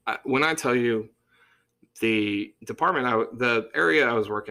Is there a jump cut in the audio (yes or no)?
no